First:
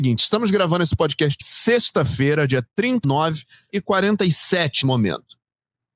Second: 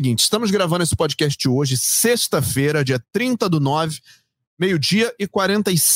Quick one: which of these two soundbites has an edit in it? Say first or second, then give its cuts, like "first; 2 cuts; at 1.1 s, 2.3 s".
first; 4 cuts; at 1.4 s, 3.0 s, 3.7 s, 4.8 s